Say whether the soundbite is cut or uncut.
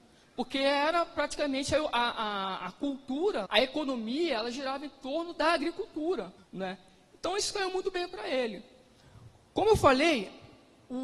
cut